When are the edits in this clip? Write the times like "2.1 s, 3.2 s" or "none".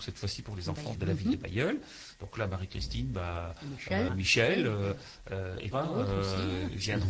0.9 s, 4.1 s, 5.7 s